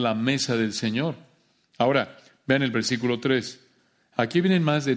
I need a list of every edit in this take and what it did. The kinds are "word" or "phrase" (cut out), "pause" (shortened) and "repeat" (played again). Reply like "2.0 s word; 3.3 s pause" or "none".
none